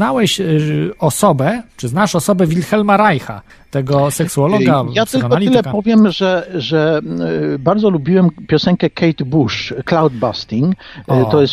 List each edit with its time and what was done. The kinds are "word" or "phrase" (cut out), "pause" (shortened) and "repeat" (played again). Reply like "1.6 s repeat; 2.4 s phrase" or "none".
3.5 s pause